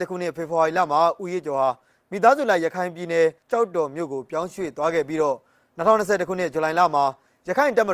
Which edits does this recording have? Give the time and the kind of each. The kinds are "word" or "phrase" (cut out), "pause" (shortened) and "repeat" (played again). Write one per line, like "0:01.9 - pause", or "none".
0:03.4 - pause